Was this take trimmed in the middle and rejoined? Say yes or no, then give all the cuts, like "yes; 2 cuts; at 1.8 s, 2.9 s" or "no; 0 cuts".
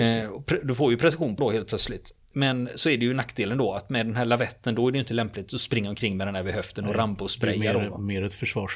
yes; 1 cut; at 1.4 s